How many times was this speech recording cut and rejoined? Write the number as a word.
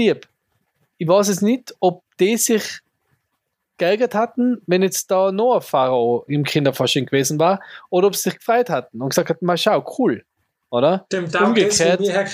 one